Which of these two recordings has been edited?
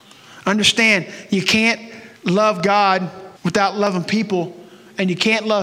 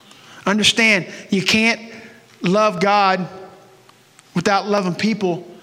first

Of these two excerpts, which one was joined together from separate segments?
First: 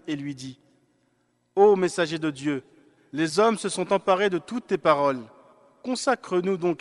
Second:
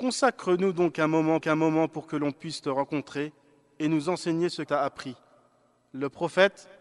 second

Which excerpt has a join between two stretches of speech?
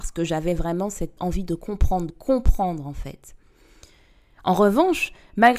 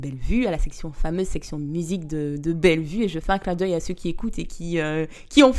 first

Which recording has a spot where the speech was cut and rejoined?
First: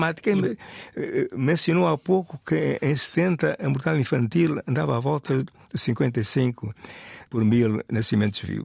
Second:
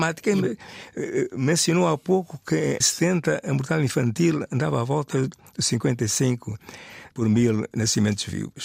second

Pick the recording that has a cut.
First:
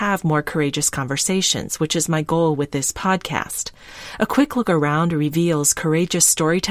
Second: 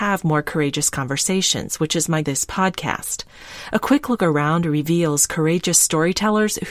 second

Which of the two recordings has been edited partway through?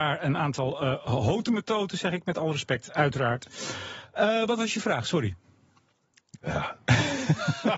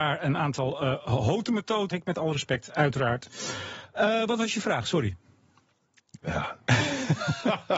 second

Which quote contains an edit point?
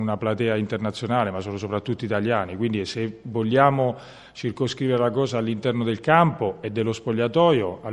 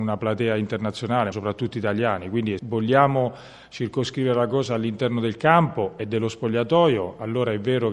second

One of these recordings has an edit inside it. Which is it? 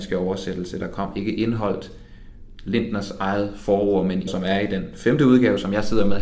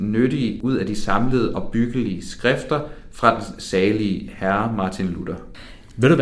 first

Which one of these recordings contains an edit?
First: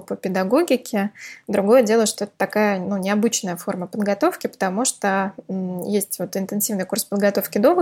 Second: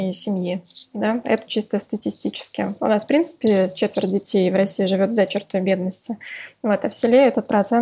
second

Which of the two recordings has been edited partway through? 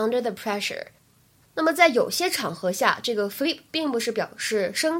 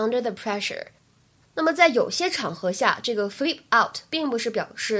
first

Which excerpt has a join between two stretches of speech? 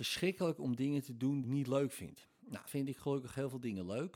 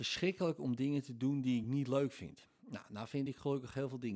first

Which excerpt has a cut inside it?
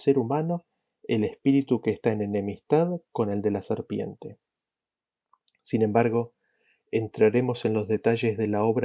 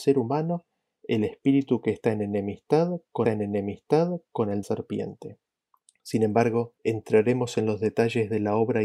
second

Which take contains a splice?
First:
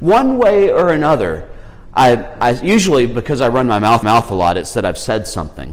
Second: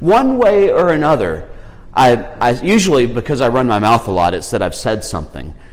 first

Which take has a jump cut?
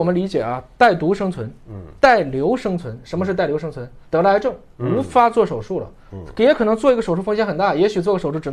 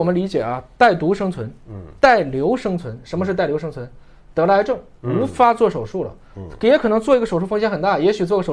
first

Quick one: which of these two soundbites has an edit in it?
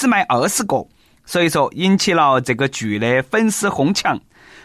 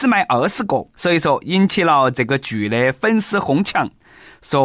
second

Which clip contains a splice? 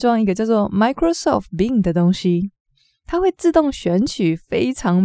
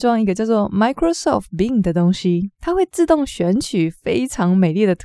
second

